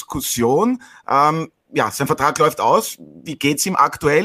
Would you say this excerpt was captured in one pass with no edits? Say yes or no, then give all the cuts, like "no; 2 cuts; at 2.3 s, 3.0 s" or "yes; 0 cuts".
yes; 0 cuts